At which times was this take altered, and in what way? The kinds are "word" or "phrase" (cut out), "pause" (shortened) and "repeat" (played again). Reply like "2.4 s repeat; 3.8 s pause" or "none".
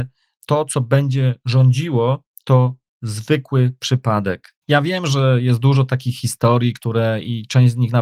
4.6 s pause